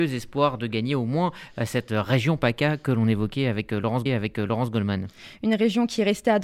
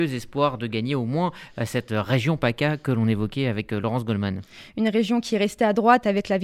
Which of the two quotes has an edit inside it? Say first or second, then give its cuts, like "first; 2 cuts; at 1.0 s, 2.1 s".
first; 1 cut; at 4.1 s